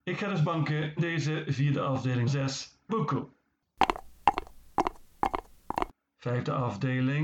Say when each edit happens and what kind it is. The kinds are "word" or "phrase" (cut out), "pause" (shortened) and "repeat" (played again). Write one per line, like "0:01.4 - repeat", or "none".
0:01.0 - word
0:02.3 - word
0:02.9 - word

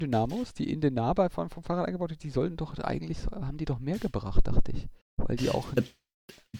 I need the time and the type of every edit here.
0:05.0 - pause

